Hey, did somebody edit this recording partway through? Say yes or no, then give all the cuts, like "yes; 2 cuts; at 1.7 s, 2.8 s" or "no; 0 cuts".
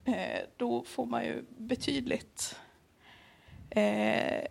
no; 0 cuts